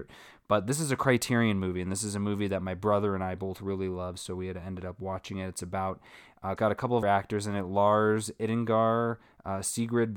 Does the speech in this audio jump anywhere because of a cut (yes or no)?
yes